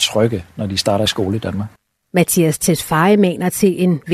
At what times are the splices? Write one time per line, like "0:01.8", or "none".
none